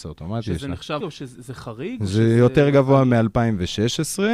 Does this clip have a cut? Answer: yes; 1 cut; at 1.0 s

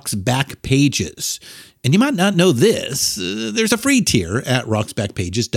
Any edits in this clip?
no; 0 cuts

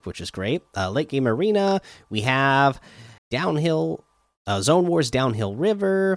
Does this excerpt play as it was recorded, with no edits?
no; 1 cut; at 3.2 s

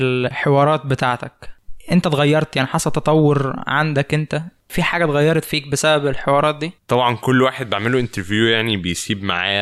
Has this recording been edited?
yes; 1 cut; at 6.8 s

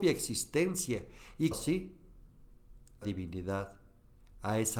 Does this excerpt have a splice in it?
yes; 2 cuts; at 1.5 s, 3.0 s

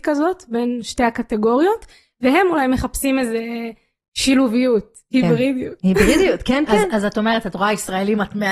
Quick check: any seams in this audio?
no; 0 cuts

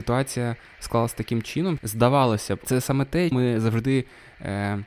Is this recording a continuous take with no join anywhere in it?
no; 3 cuts; at 1.8 s, 2.6 s, 3.3 s

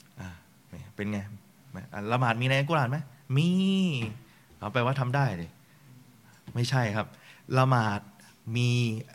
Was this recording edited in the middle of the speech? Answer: no; 0 cuts

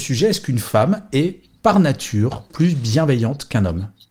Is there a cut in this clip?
no; 0 cuts

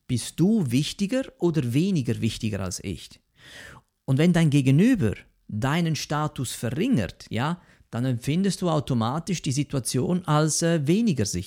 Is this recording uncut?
yes; 0 cuts

